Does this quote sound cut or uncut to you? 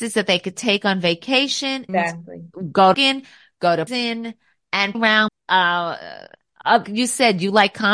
cut